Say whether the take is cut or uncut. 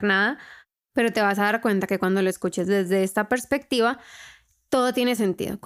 uncut